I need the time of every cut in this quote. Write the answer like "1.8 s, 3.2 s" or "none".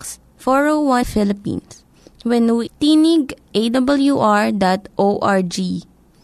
1.0 s, 2.7 s, 3.5 s